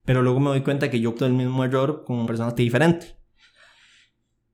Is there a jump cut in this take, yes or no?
yes